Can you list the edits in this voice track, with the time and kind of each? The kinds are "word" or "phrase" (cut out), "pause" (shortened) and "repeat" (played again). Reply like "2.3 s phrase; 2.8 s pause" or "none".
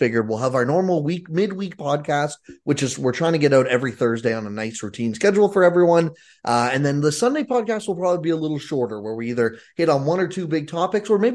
none